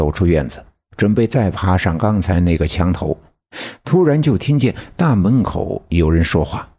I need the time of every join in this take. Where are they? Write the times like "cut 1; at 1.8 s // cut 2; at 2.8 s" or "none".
none